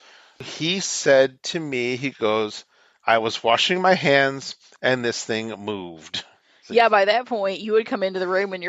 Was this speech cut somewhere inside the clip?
no; 0 cuts

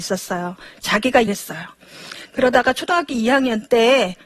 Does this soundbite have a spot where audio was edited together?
yes; 1 cut; at 1.3 s

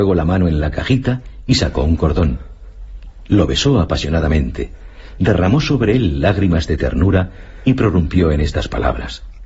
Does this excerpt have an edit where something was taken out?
no; 0 cuts

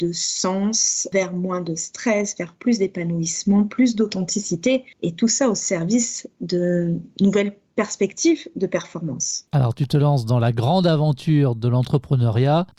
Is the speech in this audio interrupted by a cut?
no; 0 cuts

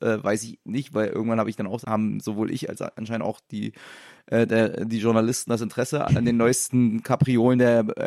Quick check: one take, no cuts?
no; 2 cuts; at 1.8 s, 6.1 s

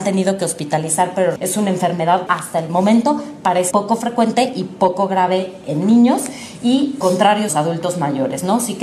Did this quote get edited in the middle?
yes; 5 cuts; at 1.4 s, 2.3 s, 3.7 s, 7.0 s, 7.5 s

